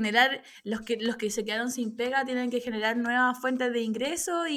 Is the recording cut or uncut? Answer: uncut